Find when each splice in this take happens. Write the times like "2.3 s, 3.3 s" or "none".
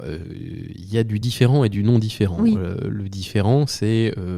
none